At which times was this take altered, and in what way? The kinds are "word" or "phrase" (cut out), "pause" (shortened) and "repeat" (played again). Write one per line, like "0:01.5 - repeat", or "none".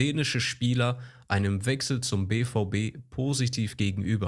none